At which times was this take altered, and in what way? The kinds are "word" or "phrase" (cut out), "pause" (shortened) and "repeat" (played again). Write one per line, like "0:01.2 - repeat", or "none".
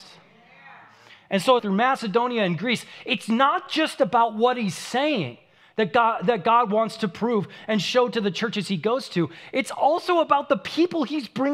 0:01.6 - phrase